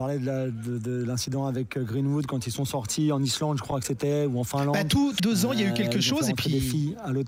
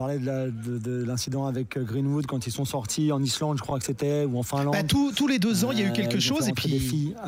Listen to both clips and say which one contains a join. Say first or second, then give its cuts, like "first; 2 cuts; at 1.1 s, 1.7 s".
first; 1 cut; at 5.2 s